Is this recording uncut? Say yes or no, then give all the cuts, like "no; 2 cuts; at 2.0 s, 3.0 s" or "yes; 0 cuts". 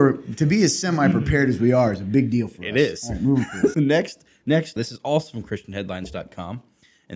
no; 2 cuts; at 3.7 s, 4.8 s